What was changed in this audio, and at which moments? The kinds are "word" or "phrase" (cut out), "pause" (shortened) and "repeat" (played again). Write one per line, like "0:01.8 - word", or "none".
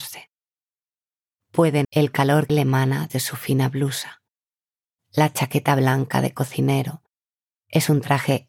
0:01.8 - word
0:02.5 - word
0:03.1 - word

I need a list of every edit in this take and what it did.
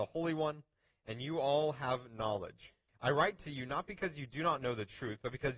0:02.9 - pause

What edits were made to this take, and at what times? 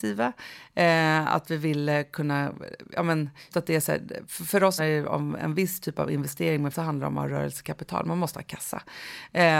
0:03.5 - word
0:04.8 - word
0:06.7 - word

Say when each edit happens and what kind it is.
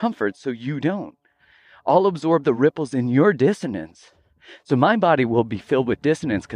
none

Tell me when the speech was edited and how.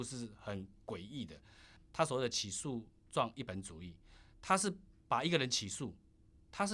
0:04.3 - pause

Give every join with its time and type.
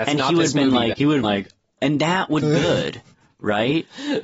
0:00.9 - word
0:01.2 - word
0:01.8 - word
0:02.4 - word

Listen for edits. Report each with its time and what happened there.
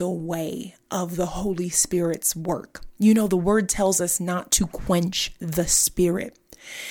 none

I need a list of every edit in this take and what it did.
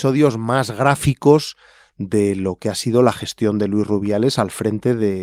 none

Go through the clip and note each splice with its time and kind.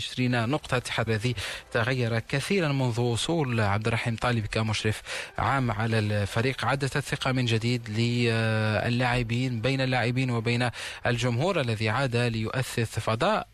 0:01.1 - word

